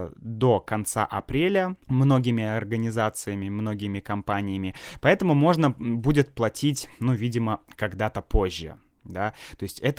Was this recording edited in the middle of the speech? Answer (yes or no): yes